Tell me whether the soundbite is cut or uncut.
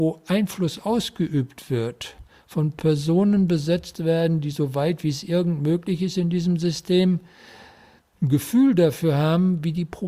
uncut